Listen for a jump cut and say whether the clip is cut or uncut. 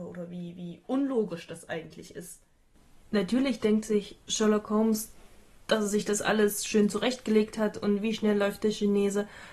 uncut